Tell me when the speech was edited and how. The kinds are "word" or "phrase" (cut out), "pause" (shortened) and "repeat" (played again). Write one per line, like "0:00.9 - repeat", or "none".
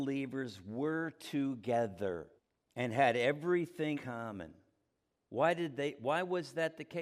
0:02.4 - pause
0:03.9 - word